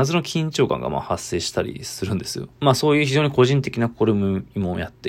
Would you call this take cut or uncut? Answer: cut